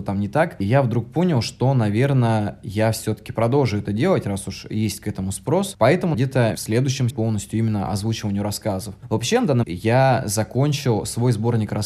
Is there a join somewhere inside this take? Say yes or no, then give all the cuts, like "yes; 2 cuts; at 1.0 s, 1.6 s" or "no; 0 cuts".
yes; 4 cuts; at 6.1 s, 6.6 s, 7.1 s, 9.6 s